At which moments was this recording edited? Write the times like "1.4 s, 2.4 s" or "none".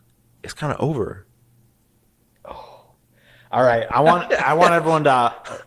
none